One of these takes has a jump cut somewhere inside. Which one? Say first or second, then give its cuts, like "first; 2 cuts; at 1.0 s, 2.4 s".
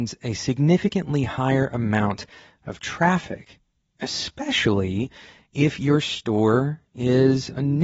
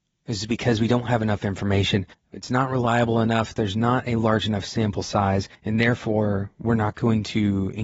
second; 2 cuts; at 2.1 s, 5.5 s